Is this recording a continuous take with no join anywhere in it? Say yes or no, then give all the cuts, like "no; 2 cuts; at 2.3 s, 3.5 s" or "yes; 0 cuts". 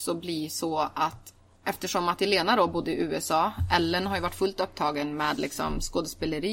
yes; 0 cuts